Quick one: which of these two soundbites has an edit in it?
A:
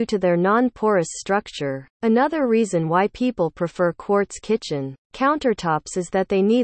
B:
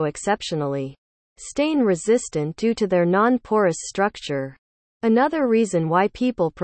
A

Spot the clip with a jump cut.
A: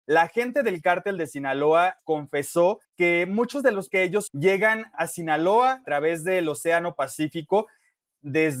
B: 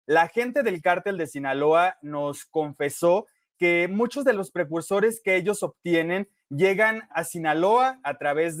A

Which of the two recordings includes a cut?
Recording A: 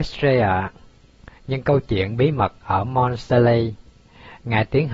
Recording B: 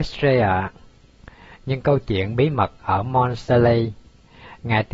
A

